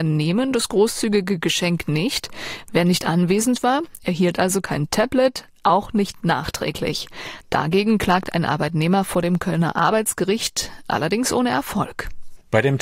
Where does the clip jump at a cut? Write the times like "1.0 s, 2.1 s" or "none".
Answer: none